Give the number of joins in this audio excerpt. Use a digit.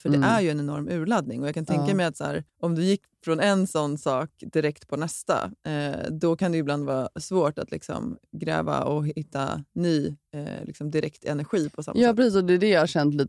2